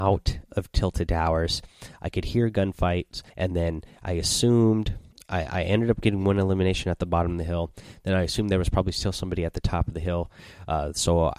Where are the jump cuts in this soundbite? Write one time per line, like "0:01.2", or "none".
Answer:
0:03.3
0:05.1